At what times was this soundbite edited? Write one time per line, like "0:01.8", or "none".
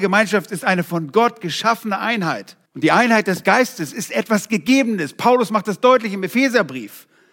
0:02.7